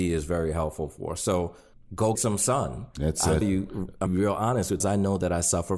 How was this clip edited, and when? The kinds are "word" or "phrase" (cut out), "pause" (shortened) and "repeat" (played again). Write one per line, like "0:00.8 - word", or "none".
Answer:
0:02.2 - word
0:03.4 - word
0:04.1 - word
0:04.8 - phrase